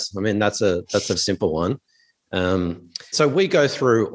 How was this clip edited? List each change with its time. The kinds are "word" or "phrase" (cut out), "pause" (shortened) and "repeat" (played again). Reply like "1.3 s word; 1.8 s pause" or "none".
1.2 s word; 3.1 s word